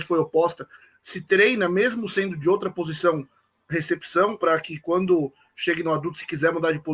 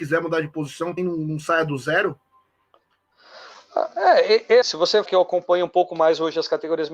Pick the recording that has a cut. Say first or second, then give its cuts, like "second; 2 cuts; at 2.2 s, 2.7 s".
second; 3 cuts; at 1.0 s, 4.6 s, 5.1 s